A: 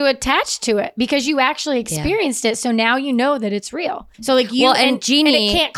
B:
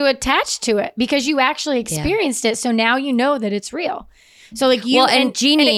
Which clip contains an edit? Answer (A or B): A